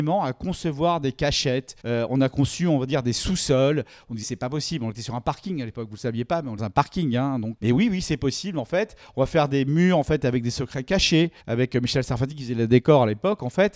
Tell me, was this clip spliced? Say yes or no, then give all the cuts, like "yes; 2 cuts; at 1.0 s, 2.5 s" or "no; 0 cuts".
yes; 5 cuts; at 1.8 s, 4.2 s, 6.6 s, 7.6 s, 11.4 s